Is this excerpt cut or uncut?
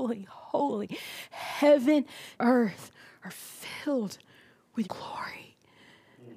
cut